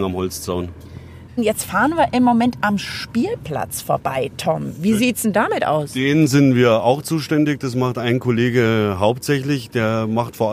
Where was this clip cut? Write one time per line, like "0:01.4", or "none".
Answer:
none